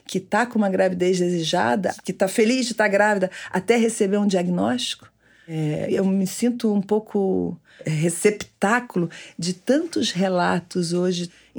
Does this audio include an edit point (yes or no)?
no